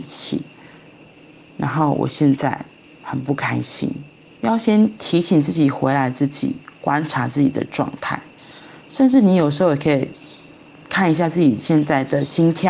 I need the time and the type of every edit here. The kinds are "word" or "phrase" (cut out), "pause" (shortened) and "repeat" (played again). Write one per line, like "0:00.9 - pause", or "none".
0:04.3 - pause